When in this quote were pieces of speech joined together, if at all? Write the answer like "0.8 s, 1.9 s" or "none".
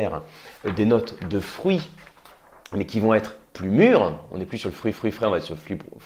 4.9 s